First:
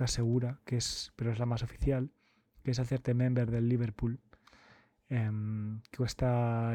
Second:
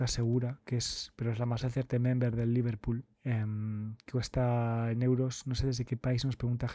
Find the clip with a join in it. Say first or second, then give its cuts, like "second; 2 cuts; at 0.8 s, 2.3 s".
second; 2 cuts; at 1.6 s, 3.1 s